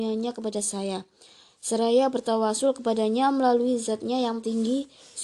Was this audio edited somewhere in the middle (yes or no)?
no